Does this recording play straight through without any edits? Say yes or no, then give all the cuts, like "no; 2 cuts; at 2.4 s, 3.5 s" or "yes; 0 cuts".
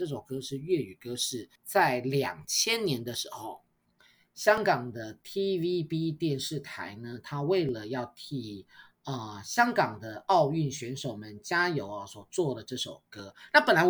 no; 2 cuts; at 1.6 s, 4.0 s